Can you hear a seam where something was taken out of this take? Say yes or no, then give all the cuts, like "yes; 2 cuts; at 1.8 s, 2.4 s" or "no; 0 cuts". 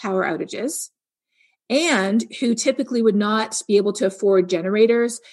no; 0 cuts